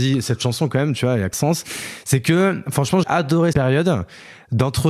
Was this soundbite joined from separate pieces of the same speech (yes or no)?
yes